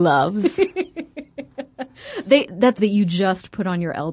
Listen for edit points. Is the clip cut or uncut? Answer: cut